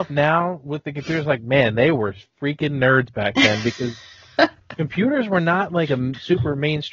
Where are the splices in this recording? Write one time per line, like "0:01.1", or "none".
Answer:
none